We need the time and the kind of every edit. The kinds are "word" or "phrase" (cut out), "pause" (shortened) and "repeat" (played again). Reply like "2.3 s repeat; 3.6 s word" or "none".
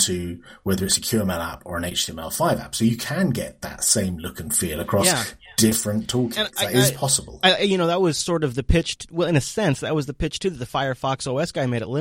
none